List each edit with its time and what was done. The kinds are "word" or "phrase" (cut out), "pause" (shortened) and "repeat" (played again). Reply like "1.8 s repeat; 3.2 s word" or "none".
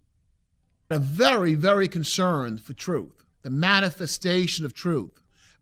0.9 s word; 3.3 s pause

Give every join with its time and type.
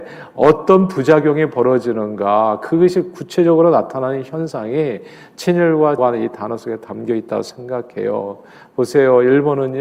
6.0 s word

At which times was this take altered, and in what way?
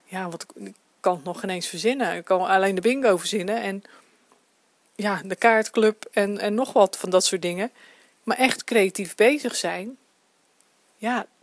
none

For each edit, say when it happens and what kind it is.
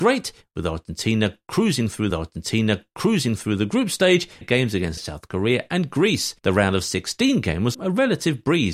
2.1 s repeat; 4.4 s phrase; 5.0 s word; 6.4 s pause; 7.7 s word

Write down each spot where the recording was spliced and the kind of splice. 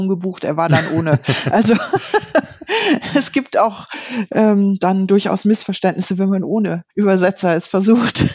6.9 s pause

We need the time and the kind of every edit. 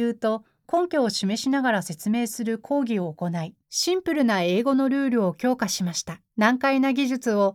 3.6 s pause; 6.3 s pause

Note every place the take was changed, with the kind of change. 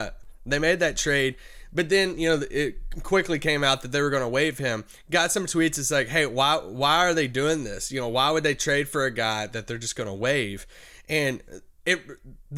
none

